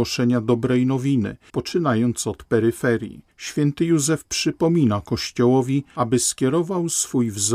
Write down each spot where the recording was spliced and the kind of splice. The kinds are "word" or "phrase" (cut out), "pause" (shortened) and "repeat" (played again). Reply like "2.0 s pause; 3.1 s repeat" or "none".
3.3 s pause